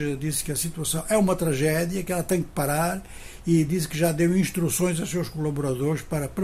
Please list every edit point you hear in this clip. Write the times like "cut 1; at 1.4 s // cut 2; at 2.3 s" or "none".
none